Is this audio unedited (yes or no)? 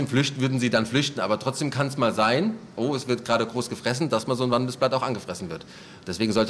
yes